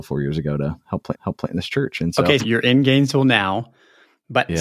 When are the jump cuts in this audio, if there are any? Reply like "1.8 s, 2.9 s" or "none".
1.1 s, 2.4 s